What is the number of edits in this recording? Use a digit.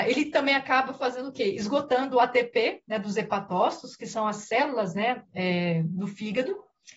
0